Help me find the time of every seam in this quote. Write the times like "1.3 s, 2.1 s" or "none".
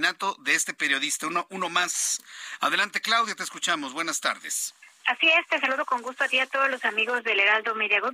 4.9 s